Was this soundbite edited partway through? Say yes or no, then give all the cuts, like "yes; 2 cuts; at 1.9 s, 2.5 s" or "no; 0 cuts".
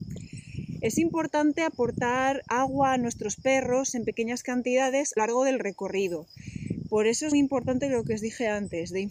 yes; 3 cuts; at 2.5 s, 5.2 s, 7.3 s